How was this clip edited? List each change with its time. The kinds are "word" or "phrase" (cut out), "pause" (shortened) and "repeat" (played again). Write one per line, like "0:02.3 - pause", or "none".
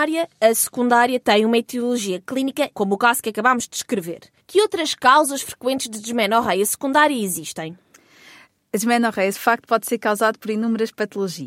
0:02.7 - word
0:04.4 - pause
0:09.3 - word